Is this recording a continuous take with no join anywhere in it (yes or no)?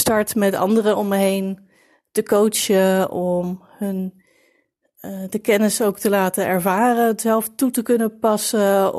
yes